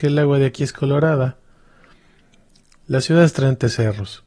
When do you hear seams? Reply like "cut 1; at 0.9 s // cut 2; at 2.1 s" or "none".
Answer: none